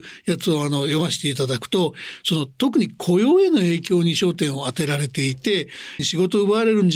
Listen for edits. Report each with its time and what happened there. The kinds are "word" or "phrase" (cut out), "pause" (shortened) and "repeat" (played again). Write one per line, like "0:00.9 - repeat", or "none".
0:06.0 - word